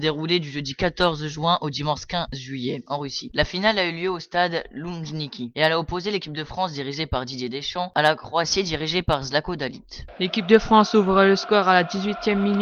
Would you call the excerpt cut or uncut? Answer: uncut